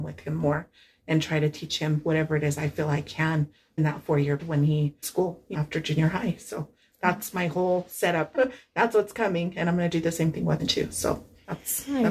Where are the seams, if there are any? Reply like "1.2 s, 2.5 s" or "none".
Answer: 3.8 s, 4.4 s, 5.0 s, 5.5 s, 8.3 s, 10.6 s